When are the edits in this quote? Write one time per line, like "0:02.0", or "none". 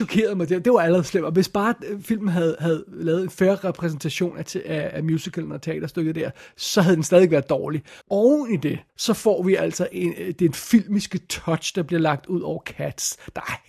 0:08.0
0:08.9